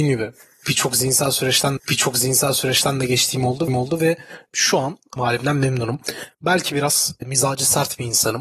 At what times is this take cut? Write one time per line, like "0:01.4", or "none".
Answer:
0:01.8
0:03.7
0:05.2